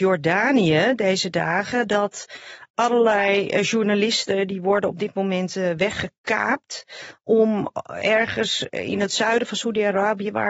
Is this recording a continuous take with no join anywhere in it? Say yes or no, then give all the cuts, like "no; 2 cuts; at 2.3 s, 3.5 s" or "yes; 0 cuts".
yes; 0 cuts